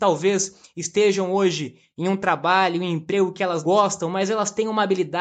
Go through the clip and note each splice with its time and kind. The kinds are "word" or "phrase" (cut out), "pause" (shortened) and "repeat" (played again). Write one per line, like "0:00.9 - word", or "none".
0:03.6 - word